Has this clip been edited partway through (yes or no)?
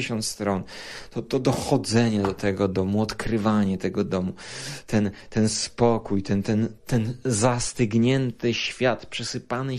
yes